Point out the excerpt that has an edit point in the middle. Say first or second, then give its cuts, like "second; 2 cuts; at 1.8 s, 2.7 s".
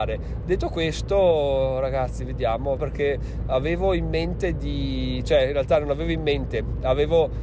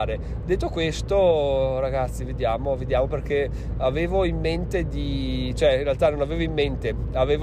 first; 1 cut; at 2.8 s